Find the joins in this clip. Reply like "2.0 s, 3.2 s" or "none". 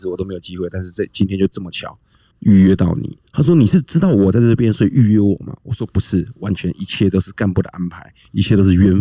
2.3 s